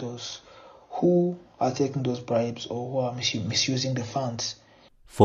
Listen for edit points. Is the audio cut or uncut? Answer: uncut